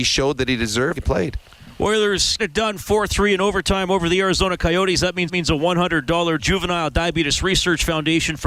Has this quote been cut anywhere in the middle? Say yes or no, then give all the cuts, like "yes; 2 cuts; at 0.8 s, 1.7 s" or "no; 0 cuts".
yes; 4 cuts; at 1.0 s, 2.4 s, 5.3 s, 6.4 s